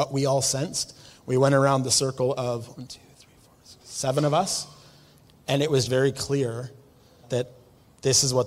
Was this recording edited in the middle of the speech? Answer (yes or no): yes